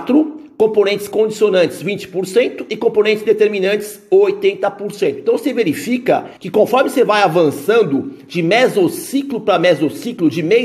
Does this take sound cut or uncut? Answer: cut